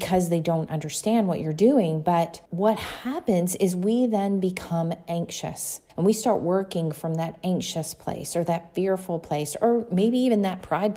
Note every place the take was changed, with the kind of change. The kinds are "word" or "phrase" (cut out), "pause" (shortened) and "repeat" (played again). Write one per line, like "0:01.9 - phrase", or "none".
0:02.5 - pause
0:05.9 - pause